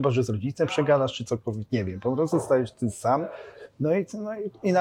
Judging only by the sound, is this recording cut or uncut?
uncut